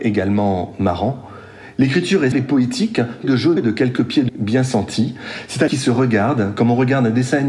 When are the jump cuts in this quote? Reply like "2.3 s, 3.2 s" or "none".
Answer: 2.3 s, 3.2 s, 3.6 s, 4.3 s, 5.7 s